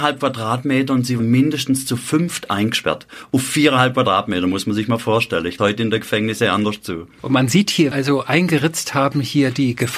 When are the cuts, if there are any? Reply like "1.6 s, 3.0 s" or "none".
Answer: 1.2 s, 5.6 s, 7.9 s